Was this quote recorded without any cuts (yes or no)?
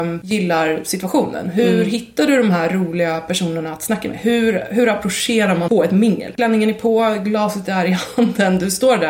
no